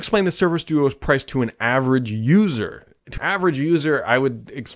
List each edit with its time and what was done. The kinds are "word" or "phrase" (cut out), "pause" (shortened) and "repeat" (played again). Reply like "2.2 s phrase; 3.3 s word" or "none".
3.2 s word